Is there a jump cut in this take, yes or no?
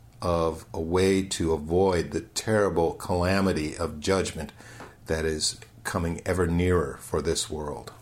no